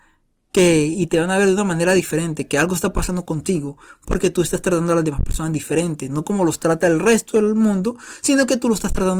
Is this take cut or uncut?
uncut